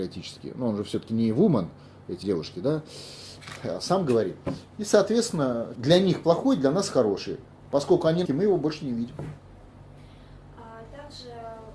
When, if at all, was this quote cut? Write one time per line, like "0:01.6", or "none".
0:02.2
0:05.7
0:08.2